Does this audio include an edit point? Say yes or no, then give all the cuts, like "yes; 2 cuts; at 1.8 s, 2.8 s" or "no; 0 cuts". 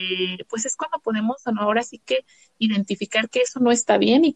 no; 0 cuts